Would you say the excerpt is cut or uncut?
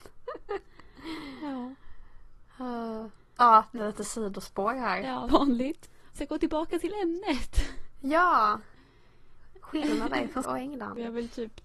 cut